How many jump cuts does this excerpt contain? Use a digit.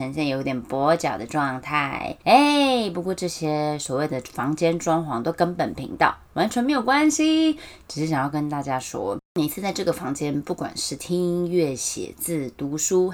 1